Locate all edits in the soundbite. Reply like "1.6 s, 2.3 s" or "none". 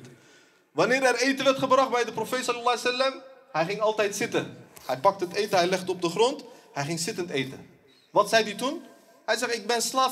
none